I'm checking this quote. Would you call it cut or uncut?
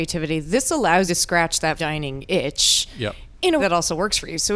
cut